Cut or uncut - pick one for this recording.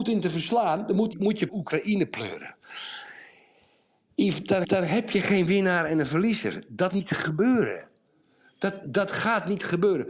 cut